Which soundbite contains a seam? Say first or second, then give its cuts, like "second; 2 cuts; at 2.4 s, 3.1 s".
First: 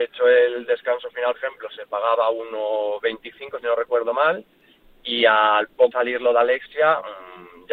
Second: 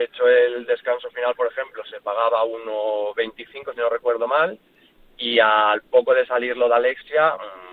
first; 2 cuts; at 1.3 s, 5.9 s